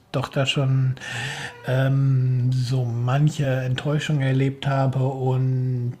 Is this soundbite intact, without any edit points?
yes; 0 cuts

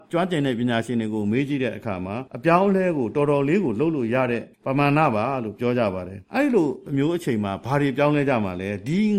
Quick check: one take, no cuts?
no; 3 cuts; at 2.3 s, 4.5 s, 6.2 s

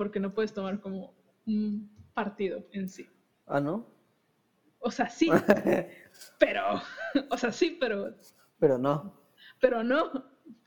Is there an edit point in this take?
no; 0 cuts

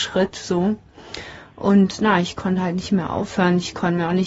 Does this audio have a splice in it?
no; 0 cuts

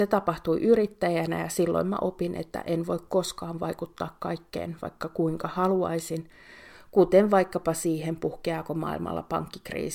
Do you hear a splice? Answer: no; 0 cuts

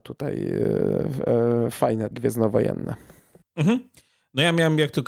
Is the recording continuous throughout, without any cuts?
no; 1 cut; at 2.1 s

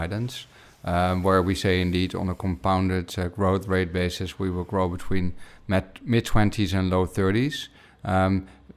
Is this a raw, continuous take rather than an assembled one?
yes; 0 cuts

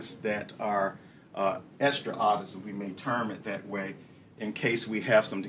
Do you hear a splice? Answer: no; 0 cuts

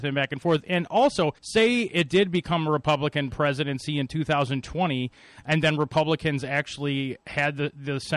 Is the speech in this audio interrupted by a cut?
yes; 1 cut; at 1.4 s

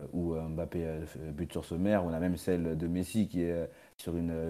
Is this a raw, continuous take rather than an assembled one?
yes; 0 cuts

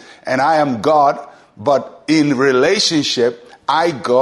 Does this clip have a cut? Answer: no; 0 cuts

